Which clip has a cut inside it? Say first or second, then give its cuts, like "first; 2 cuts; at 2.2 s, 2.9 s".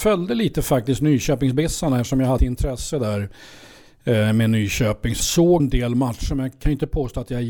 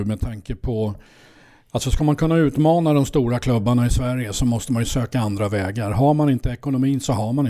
first; 3 cuts; at 2.4 s, 5.2 s, 5.6 s